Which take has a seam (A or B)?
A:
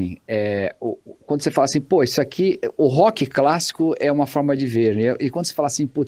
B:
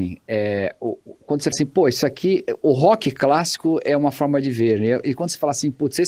B